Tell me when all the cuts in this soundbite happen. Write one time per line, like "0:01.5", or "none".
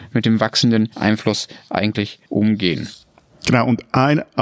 0:00.9
0:02.2

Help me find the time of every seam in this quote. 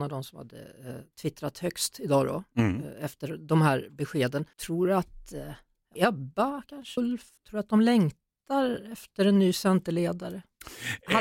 0:04.5
0:06.0
0:07.0
0:07.4

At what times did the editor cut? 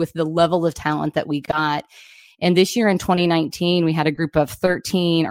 none

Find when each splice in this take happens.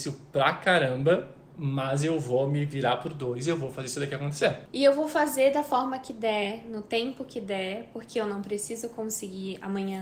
none

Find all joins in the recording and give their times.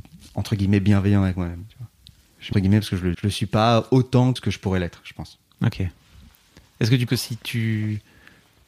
0:02.5
0:03.1
0:04.4
0:07.1

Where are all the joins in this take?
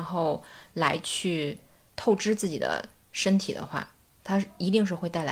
none

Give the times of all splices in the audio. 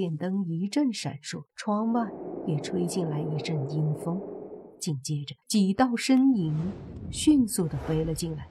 0:01.5
0:05.4

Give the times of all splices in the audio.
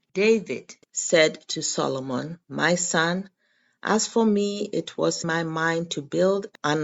0:02.4
0:05.2

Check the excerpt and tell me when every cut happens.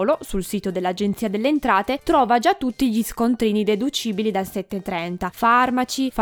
0:05.3

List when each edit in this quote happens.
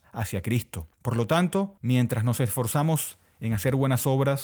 0:00.9
0:01.8

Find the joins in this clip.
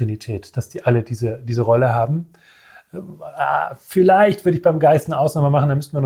none

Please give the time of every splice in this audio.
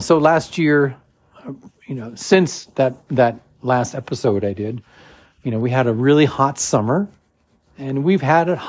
none

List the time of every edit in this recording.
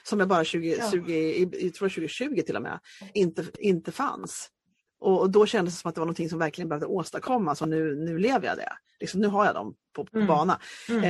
none

